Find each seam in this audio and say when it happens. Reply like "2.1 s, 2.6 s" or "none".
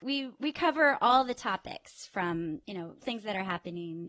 3.0 s